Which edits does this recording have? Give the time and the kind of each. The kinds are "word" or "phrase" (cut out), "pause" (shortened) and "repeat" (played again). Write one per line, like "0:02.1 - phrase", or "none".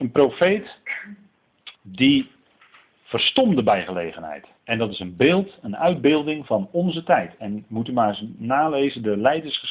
0:01.7 - pause
0:04.6 - pause